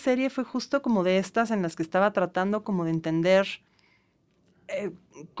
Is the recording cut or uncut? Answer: uncut